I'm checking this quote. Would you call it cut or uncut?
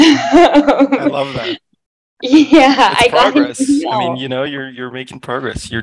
uncut